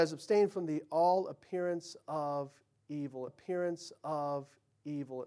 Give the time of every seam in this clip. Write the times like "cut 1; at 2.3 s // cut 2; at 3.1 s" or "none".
cut 1; at 3.3 s